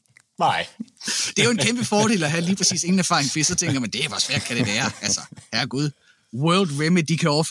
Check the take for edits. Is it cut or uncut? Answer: uncut